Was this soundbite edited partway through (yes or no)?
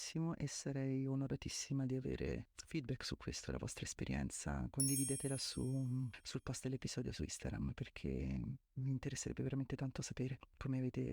yes